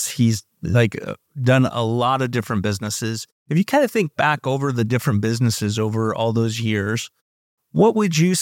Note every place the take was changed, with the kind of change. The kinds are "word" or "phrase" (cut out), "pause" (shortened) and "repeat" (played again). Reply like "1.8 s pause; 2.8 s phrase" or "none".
none